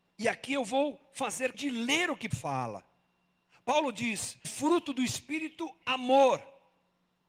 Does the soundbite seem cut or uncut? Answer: cut